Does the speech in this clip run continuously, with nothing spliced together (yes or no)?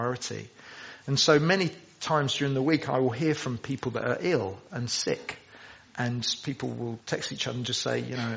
no